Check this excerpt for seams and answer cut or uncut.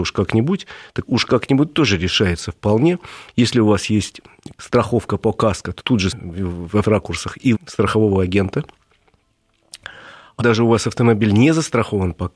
cut